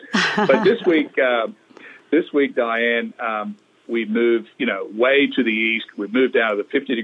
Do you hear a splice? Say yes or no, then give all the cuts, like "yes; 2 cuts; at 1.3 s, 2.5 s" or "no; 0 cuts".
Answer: no; 0 cuts